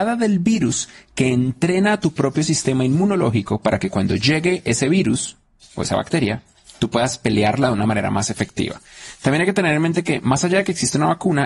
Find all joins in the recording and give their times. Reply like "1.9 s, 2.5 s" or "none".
none